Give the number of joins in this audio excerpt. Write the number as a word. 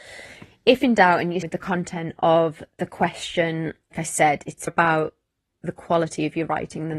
three